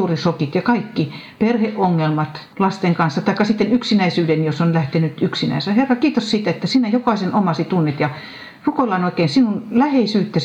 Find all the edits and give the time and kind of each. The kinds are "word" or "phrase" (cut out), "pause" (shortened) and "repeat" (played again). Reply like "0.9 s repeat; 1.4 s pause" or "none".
2.5 s pause